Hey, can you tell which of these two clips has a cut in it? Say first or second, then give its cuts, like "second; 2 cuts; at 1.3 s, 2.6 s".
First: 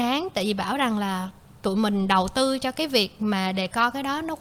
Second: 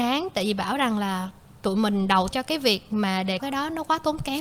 second; 2 cuts; at 2.3 s, 3.4 s